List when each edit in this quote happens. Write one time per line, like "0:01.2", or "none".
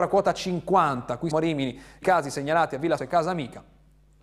0:01.3
0:02.0
0:03.0